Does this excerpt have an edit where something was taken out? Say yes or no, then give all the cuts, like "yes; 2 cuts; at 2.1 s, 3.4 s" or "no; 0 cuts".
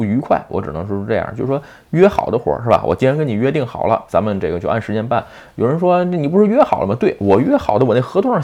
yes; 1 cut; at 4.1 s